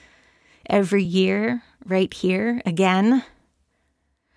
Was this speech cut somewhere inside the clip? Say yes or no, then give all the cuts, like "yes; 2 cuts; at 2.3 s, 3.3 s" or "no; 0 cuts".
no; 0 cuts